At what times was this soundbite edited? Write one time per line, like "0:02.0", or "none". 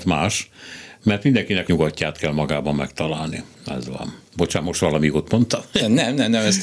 0:01.7
0:03.5
0:04.3